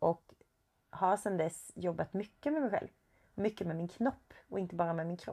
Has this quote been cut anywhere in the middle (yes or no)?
no